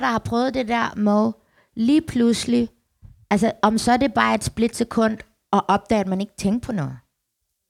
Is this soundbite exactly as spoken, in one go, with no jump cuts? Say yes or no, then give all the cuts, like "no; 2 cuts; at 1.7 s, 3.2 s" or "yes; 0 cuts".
yes; 0 cuts